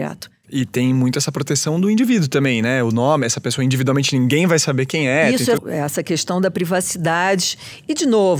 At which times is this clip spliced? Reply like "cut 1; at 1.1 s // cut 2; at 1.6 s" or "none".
cut 1; at 5.6 s